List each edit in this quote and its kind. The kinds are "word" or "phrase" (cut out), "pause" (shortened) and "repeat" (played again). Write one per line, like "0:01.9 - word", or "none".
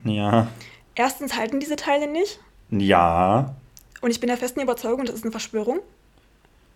none